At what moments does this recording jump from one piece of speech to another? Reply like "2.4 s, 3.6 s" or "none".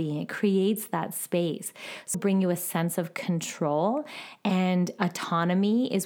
2.1 s